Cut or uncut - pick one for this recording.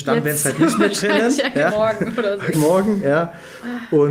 cut